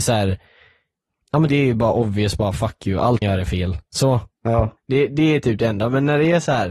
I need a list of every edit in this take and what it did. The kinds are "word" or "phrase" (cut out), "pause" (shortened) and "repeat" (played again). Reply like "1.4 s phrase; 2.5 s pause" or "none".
1.5 s phrase; 3.2 s word; 4.8 s pause